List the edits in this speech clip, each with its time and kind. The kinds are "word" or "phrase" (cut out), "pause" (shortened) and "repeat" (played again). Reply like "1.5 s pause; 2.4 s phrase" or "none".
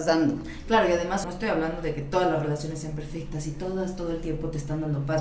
1.2 s word